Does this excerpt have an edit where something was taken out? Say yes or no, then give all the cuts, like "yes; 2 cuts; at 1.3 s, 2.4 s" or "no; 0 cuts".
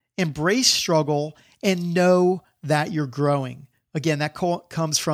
no; 0 cuts